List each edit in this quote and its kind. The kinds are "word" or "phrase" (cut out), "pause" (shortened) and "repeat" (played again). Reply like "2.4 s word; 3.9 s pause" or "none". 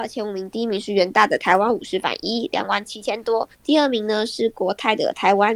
3.5 s pause